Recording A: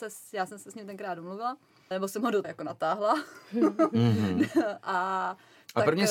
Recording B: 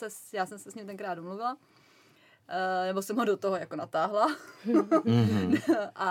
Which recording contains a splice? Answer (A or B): A